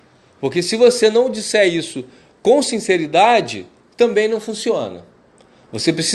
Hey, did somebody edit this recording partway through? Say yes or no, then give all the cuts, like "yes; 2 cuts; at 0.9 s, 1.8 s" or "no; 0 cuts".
no; 0 cuts